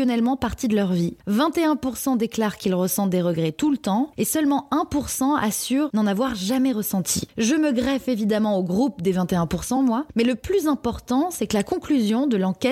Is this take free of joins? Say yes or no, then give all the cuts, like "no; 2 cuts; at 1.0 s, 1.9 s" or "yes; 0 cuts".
yes; 0 cuts